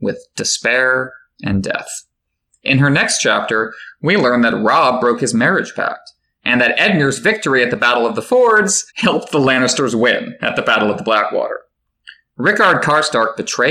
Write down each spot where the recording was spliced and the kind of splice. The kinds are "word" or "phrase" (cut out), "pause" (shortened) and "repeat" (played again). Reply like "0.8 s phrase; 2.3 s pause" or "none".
8.9 s pause